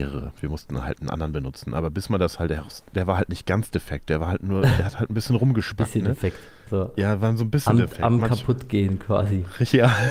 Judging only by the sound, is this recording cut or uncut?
uncut